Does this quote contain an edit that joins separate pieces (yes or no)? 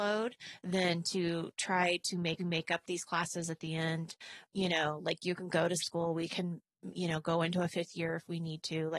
yes